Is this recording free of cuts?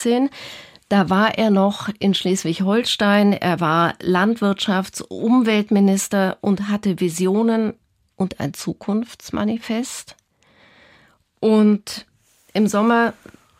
yes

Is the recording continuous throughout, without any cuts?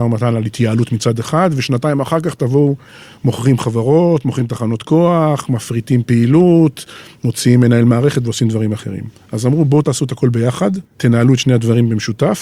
no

